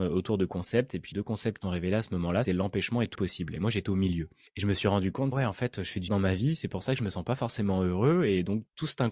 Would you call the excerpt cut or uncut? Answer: cut